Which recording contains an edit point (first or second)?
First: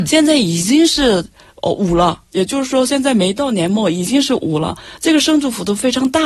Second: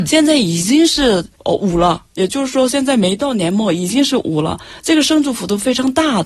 second